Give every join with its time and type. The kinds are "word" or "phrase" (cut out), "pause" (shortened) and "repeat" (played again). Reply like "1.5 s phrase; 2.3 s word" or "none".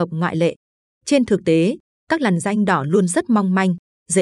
none